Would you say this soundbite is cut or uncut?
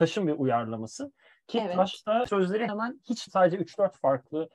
cut